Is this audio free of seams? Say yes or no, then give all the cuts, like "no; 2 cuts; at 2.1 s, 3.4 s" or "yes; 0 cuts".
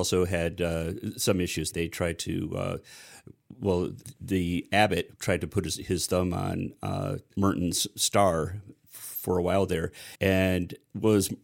no; 1 cut; at 10.1 s